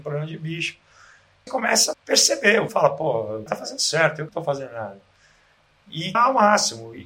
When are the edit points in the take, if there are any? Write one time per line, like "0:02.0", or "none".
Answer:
0:01.5
0:01.9
0:02.7
0:03.5
0:04.3
0:06.1